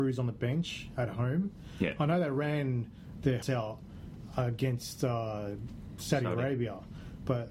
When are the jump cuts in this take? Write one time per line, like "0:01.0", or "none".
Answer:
0:03.4